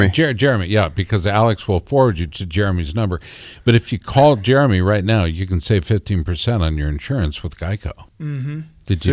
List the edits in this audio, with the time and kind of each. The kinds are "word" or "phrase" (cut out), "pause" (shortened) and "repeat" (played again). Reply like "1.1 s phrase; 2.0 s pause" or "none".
8.1 s pause